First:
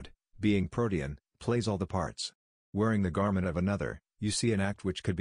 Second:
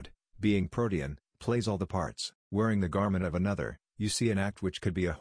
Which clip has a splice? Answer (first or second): second